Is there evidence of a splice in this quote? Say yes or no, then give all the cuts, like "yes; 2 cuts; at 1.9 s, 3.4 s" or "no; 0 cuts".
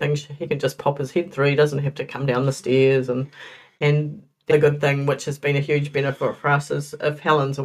yes; 1 cut; at 4.5 s